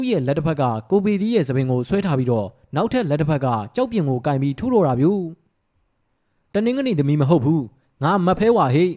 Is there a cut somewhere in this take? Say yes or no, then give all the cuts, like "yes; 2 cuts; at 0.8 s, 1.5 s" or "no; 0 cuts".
no; 0 cuts